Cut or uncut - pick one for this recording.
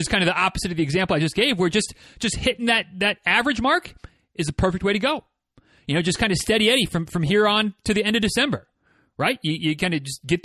uncut